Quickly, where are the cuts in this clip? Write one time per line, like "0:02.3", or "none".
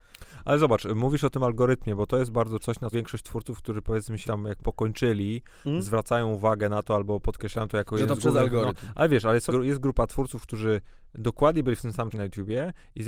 0:02.6
0:02.9
0:04.2
0:04.6
0:09.5
0:12.1